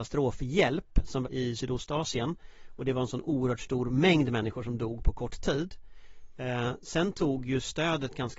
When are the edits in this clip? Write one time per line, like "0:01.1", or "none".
0:01.2